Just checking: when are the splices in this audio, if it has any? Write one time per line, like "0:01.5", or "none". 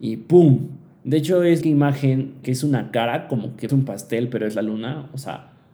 0:01.6
0:02.4
0:03.7